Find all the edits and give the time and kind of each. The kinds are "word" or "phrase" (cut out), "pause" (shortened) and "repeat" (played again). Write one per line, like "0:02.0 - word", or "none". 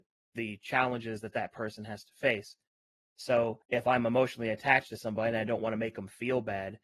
0:03.6 - pause